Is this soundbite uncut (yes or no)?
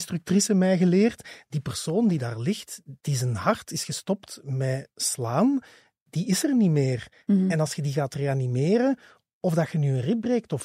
no